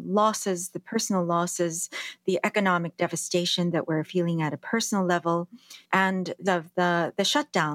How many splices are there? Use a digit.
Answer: 2